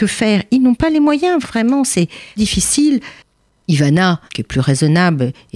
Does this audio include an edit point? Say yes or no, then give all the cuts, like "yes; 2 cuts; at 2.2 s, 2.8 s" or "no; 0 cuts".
yes; 3 cuts; at 1.4 s, 2.4 s, 4.3 s